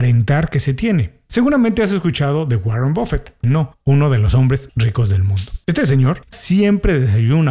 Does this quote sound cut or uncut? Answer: cut